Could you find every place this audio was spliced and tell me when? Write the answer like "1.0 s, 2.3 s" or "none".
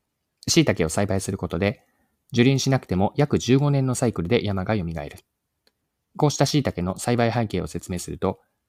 none